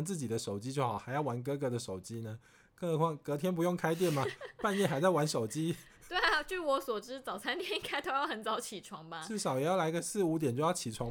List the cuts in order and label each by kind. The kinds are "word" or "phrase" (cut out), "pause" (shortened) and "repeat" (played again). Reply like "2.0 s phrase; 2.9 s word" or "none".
none